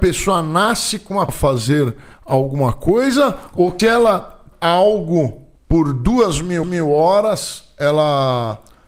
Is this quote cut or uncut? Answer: cut